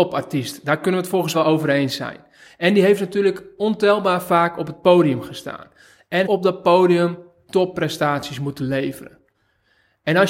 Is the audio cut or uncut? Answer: cut